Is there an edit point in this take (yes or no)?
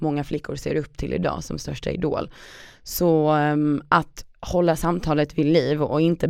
no